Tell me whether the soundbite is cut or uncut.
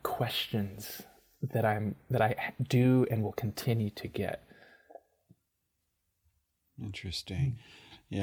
uncut